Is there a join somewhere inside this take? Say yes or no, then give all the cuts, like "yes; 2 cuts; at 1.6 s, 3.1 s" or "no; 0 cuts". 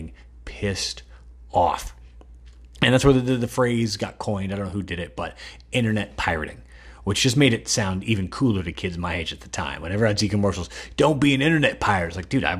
no; 0 cuts